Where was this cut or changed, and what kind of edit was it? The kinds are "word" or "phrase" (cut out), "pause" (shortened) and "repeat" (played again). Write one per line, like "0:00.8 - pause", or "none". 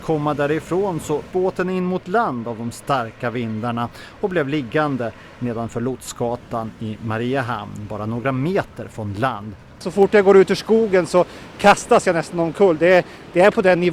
0:01.3 - word